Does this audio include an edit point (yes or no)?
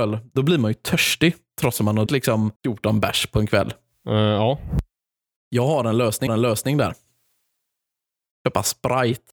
yes